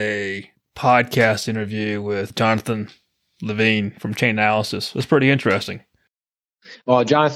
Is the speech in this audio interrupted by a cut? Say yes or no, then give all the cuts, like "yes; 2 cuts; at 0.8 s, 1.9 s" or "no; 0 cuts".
no; 0 cuts